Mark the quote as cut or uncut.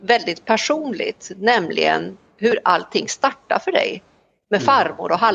uncut